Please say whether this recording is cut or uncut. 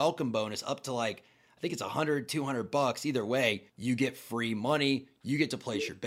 cut